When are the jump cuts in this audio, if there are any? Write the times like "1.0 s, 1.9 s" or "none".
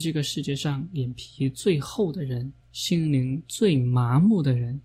2.6 s